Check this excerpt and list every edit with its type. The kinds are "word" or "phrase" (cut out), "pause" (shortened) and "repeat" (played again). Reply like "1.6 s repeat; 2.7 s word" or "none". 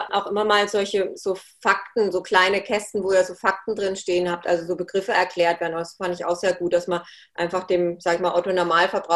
6.2 s word